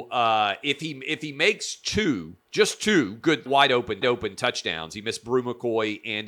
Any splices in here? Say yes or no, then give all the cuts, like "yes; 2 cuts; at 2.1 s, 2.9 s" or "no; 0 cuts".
yes; 3 cuts; at 2.4 s, 3.5 s, 4.0 s